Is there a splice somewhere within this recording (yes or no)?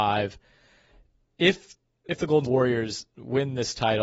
yes